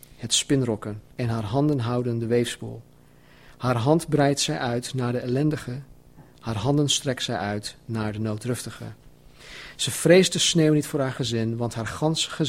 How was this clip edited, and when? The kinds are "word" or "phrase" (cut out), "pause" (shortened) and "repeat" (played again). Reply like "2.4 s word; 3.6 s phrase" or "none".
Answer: 1.1 s pause

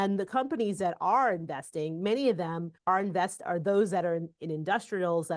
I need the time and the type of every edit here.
2.8 s pause

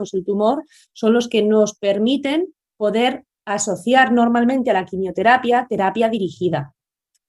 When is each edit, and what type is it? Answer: none

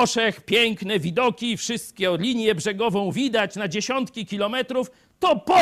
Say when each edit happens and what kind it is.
none

